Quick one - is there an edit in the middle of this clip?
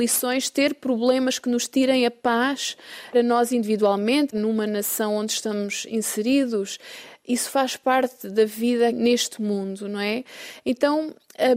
yes; 3 cuts; at 3.1 s, 4.3 s, 8.9 s

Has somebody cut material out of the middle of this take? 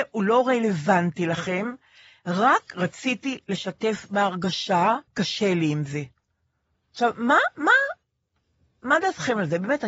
yes; 1 cut; at 5.1 s

